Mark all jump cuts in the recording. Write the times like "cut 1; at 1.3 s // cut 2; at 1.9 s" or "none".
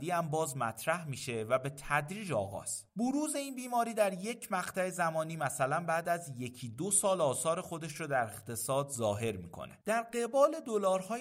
cut 1; at 2.9 s // cut 2; at 9.8 s